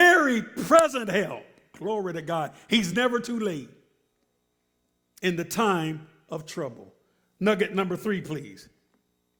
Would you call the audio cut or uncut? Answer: uncut